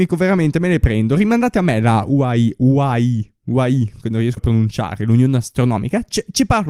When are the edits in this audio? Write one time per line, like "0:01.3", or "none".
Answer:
0:04.4